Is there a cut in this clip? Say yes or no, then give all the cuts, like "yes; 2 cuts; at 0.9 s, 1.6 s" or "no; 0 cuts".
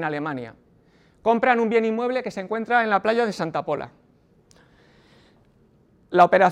no; 0 cuts